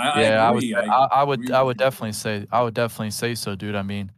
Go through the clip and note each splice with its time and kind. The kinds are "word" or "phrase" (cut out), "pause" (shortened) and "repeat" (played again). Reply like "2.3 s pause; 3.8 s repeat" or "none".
none

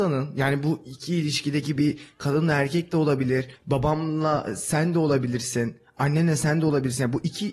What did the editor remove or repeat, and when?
3.5 s pause

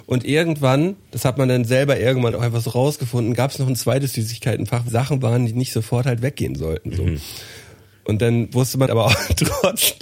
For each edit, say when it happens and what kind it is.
1.0 s pause; 2.3 s word; 4.9 s word; 8.9 s word

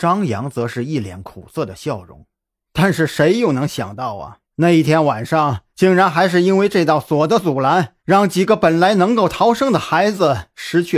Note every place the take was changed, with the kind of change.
2.5 s pause; 4.4 s pause; 5.7 s pause; 8.0 s pause

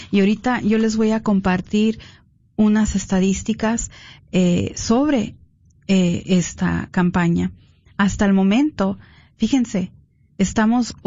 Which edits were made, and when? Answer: none

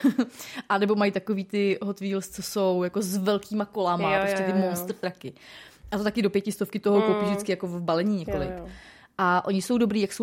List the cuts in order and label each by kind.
none

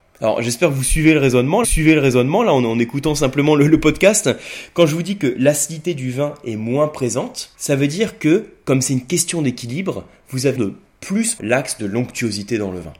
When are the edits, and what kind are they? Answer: 1.6 s repeat; 7.5 s pause; 10.6 s word; 11.4 s word

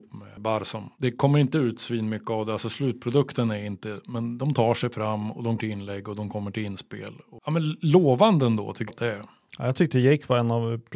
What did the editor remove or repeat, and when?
0.9 s pause; 5.6 s word; 8.9 s word

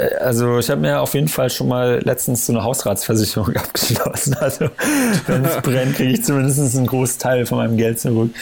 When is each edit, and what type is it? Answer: none

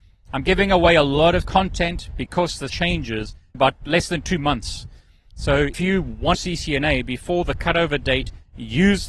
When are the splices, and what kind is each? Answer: 1.4 s word; 2.7 s word; 3.5 s word; 5.7 s word; 6.3 s phrase

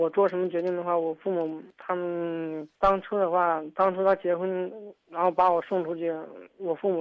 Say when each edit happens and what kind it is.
1.7 s pause; 2.7 s pause

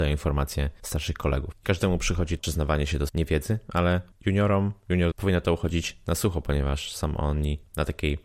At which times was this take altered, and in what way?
2.4 s phrase; 3.1 s word; 5.1 s word

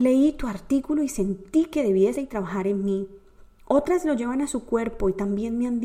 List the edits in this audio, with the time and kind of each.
2.1 s word

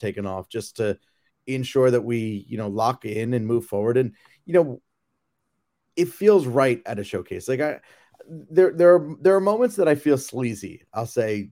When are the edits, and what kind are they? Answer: none

